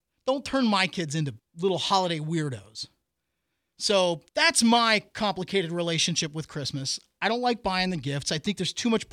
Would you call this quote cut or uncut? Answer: cut